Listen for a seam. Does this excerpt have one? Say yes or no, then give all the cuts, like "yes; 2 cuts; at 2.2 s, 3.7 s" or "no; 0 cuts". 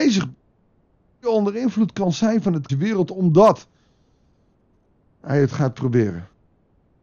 yes; 1 cut; at 2.7 s